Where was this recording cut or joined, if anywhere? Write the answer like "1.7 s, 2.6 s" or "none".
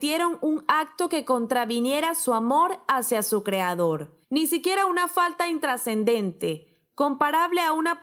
4.2 s